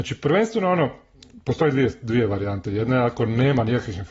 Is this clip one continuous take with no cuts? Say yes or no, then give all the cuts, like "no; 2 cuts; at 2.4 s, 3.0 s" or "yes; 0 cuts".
yes; 0 cuts